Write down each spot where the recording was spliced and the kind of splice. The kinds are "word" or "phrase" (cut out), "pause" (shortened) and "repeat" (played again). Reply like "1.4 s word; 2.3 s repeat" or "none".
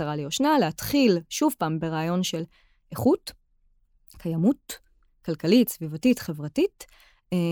none